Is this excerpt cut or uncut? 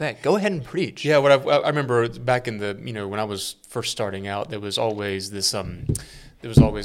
uncut